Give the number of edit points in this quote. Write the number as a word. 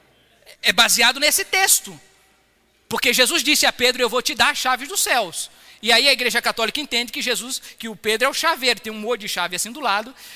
zero